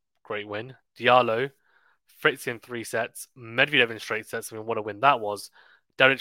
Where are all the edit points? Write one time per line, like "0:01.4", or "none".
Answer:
none

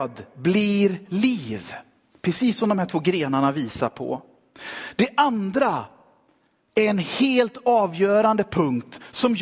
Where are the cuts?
none

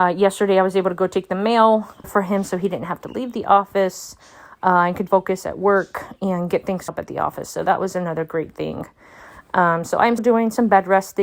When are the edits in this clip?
0:02.0
0:05.1
0:06.9
0:10.2

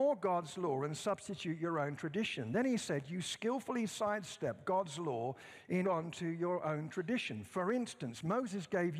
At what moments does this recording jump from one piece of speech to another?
0:05.8

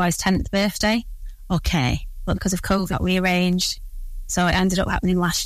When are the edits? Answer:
0:02.3
0:02.9

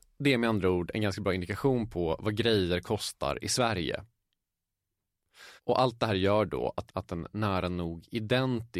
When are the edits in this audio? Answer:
0:05.6
0:06.9

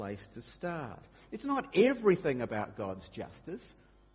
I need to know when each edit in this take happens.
none

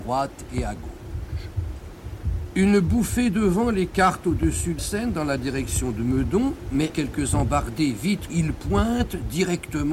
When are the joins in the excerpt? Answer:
0:04.8
0:06.9
0:08.3

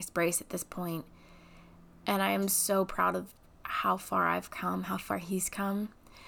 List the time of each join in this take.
none

